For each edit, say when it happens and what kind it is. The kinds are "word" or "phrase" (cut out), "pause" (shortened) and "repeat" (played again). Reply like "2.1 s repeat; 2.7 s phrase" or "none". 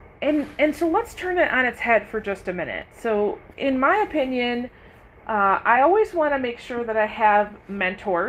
none